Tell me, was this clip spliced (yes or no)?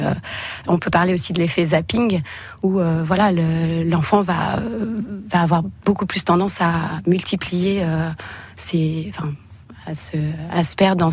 no